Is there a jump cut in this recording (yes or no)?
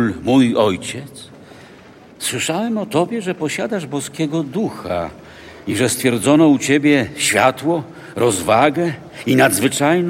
yes